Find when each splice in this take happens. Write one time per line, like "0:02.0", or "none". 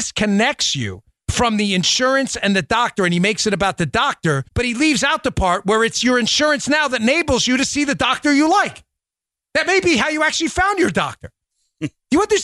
0:04.5